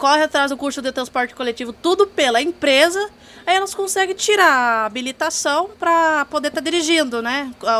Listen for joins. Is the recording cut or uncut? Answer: uncut